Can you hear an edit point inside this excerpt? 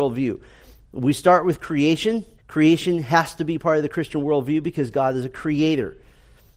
yes; 1 cut; at 2.4 s

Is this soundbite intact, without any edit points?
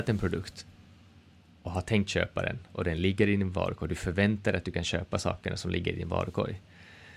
yes; 0 cuts

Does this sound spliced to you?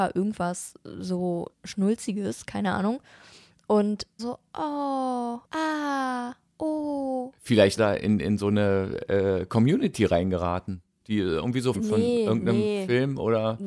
yes; 5 cuts; at 1.5 s, 4.2 s, 5.5 s, 7.8 s, 11.7 s

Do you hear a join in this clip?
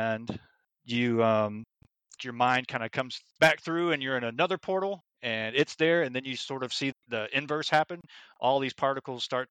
yes; 3 cuts; at 2.2 s, 5.1 s, 6.9 s

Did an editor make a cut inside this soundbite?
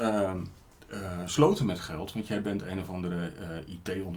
no; 0 cuts

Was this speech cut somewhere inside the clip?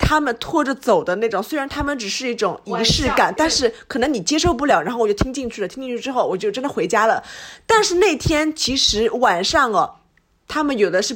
yes; 1 cut; at 3.4 s

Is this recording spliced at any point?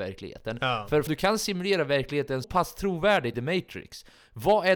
yes; 3 cuts; at 1.1 s, 2.4 s, 3.3 s

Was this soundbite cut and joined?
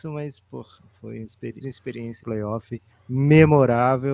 yes; 3 cuts; at 1.6 s, 2.2 s, 2.9 s

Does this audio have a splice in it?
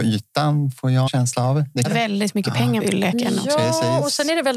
yes; 3 cuts; at 1.1 s, 1.8 s, 2.8 s

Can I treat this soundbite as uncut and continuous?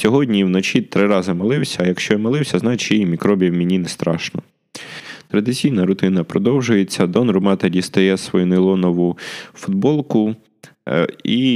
yes; 0 cuts

